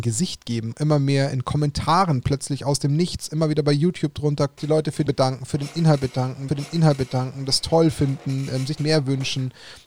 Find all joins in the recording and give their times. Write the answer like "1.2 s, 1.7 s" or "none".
4.6 s, 5.1 s, 6.5 s, 8.8 s